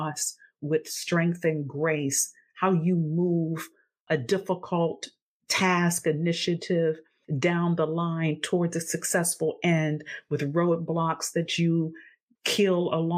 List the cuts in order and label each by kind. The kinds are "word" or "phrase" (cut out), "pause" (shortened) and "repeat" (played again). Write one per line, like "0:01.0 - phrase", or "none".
none